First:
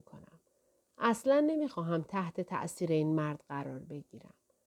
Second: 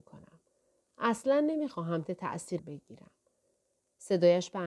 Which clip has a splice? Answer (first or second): second